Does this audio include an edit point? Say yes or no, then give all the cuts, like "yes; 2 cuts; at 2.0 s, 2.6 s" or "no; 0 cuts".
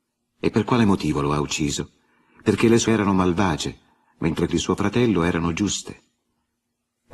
yes; 2 cuts; at 2.9 s, 4.5 s